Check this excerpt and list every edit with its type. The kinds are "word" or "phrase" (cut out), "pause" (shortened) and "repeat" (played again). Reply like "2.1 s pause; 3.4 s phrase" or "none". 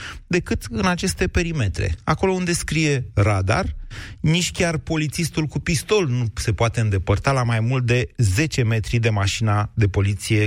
none